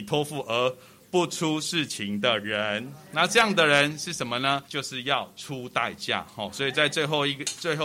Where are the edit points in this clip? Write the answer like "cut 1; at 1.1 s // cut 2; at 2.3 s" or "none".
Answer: cut 1; at 4.6 s